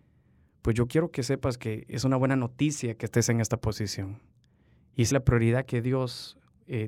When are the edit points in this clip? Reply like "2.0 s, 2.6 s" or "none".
5.1 s